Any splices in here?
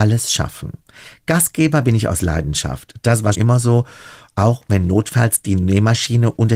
yes; 1 cut; at 3.3 s

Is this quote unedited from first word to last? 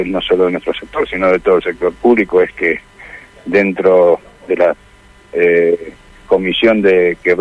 yes; 0 cuts

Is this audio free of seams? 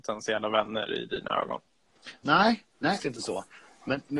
no; 1 cut; at 3.0 s

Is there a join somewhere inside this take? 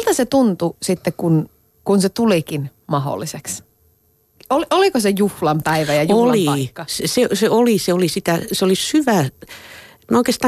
no; 0 cuts

